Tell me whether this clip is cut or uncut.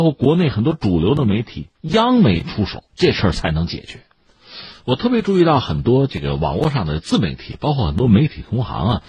cut